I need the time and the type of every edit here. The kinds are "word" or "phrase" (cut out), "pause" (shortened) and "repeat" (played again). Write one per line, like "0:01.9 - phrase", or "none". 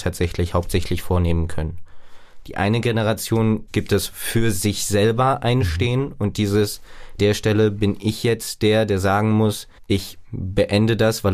0:07.2 - phrase